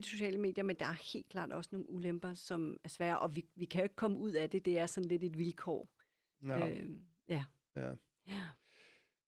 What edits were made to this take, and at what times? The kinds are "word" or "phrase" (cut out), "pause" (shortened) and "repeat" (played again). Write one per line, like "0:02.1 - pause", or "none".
none